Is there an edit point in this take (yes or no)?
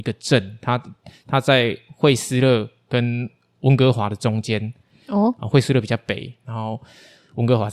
no